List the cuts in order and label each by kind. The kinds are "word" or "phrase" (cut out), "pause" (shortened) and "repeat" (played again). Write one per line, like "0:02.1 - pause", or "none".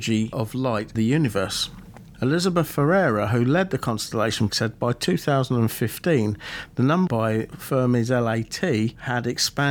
0:01.0 - word
0:04.5 - word
0:07.1 - phrase